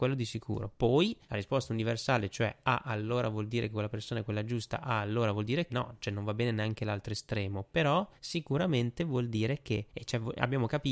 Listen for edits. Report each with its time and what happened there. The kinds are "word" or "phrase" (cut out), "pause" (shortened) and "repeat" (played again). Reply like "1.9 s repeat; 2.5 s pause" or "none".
1.2 s pause; 5.7 s word; 8.2 s pause; 9.9 s pause